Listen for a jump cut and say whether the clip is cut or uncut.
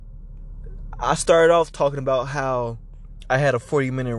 uncut